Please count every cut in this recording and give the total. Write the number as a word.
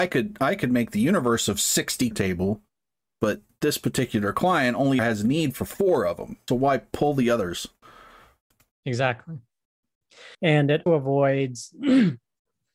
five